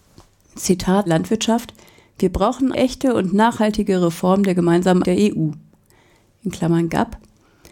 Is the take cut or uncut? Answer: cut